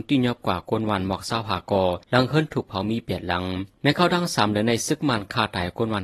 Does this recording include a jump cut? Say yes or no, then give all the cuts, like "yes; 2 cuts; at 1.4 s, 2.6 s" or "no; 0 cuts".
yes; 2 cuts; at 2.0 s, 3.7 s